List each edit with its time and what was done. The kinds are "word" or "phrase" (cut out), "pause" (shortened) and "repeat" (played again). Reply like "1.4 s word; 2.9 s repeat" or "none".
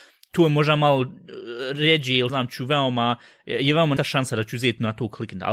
2.3 s word; 4.0 s word

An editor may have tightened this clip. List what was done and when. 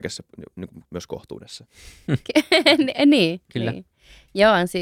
none

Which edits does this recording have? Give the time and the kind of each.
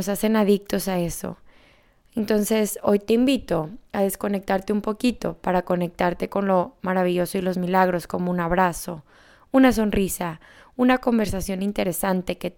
none

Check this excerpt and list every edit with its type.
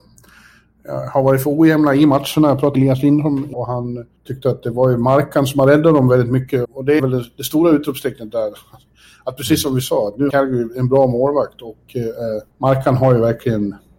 2.7 s word; 3.5 s word; 4.2 s pause; 6.6 s word; 7.0 s word; 10.3 s word; 12.5 s pause

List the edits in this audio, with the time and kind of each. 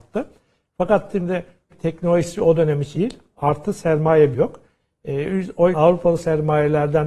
1.7 s word; 2.9 s word; 4.3 s word; 5.7 s word

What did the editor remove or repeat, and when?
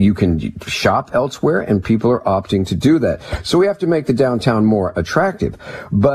none

